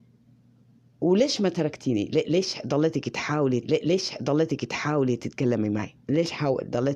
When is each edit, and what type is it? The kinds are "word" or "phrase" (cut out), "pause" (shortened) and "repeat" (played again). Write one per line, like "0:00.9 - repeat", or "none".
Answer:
0:03.6 - repeat
0:06.0 - pause